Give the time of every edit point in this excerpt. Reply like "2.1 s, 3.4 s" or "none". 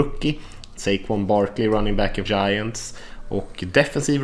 2.3 s